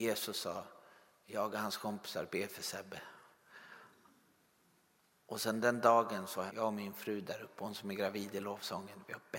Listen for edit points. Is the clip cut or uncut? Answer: cut